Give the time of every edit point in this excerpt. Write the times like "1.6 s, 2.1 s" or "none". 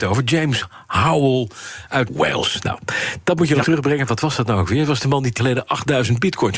2.1 s, 3.6 s, 5.4 s